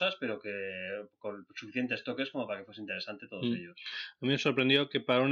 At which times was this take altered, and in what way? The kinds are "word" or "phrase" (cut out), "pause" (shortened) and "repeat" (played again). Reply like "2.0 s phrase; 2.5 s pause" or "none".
none